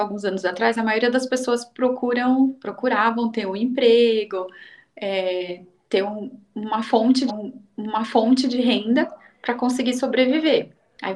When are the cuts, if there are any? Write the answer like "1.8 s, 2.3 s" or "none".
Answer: 7.3 s